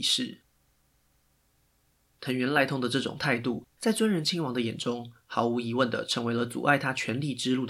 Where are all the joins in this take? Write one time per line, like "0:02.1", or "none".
0:03.7